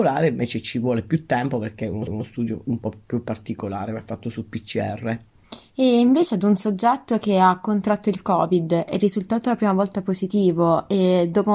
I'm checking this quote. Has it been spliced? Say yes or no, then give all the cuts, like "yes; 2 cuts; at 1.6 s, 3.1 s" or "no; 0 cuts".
yes; 1 cut; at 2.1 s